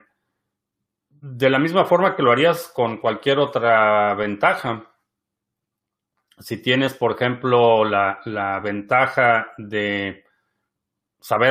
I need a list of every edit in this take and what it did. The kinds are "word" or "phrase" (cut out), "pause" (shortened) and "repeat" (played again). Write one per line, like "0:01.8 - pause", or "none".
none